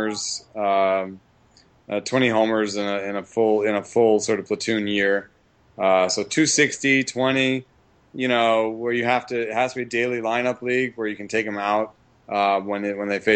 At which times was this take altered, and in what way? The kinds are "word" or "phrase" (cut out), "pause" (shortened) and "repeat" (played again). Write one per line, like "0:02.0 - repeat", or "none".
none